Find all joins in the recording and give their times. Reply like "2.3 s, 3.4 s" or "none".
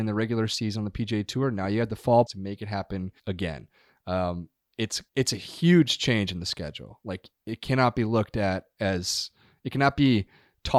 2.3 s, 3.2 s, 5.1 s, 7.4 s

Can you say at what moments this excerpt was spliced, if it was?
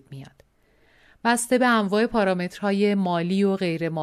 none

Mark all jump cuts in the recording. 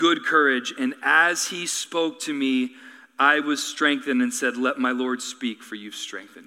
none

